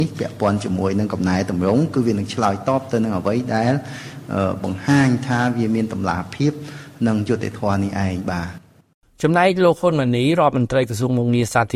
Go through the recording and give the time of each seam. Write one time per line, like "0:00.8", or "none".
none